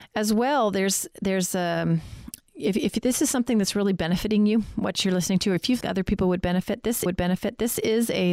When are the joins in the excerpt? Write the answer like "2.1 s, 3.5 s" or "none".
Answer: 5.8 s, 7.1 s